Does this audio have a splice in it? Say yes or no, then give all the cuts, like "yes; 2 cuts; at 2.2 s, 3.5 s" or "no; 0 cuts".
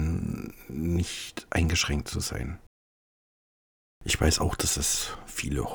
no; 0 cuts